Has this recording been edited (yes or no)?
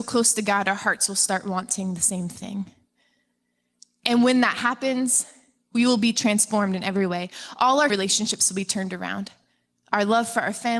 yes